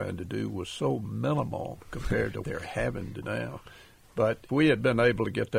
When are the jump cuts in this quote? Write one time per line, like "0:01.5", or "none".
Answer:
0:02.4
0:03.2
0:04.5